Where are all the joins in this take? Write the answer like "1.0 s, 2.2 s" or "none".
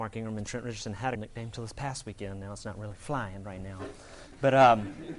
1.2 s